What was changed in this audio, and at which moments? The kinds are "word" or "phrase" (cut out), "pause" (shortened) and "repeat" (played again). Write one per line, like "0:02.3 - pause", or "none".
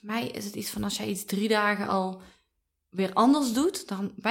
none